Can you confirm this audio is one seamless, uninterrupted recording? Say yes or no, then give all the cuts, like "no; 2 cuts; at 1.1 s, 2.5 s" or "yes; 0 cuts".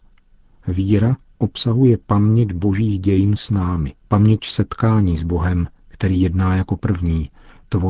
no; 1 cut; at 4.0 s